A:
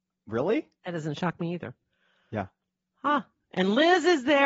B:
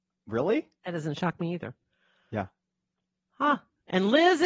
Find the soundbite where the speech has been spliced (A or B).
A